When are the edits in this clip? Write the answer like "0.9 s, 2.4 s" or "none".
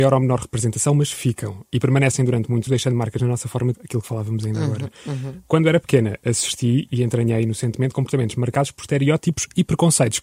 2.7 s, 3.2 s, 3.7 s